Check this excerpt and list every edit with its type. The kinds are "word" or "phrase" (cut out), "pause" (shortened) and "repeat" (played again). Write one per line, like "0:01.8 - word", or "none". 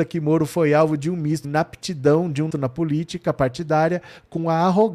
0:01.4 - word
0:02.5 - word

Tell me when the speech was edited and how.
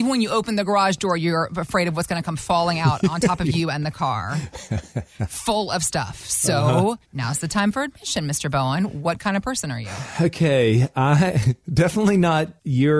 0:07.0 - pause

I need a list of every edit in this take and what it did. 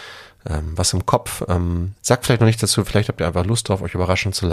0:02.0 - pause

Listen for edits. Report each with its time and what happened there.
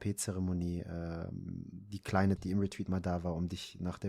0:02.4 - word

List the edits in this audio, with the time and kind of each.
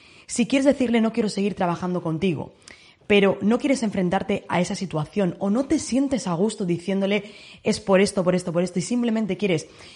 none

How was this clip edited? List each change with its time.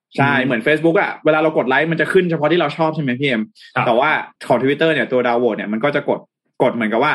0:04.4 - pause

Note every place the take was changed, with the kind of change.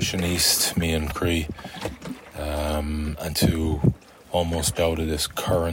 0:01.1 - word
0:03.3 - word
0:04.8 - word

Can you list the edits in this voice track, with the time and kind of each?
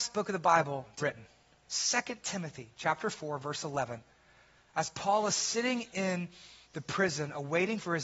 0:01.0 - word

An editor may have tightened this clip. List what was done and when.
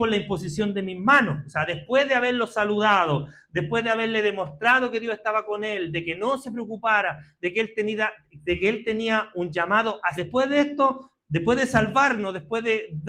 0:10.2 - phrase

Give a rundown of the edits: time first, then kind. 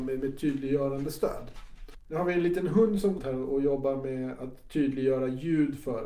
0:03.2 - word

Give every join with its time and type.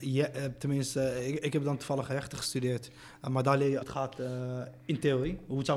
0:03.8 - word

